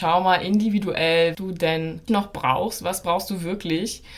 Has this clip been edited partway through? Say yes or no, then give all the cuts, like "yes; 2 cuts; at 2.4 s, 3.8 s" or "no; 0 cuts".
yes; 2 cuts; at 1.3 s, 2.1 s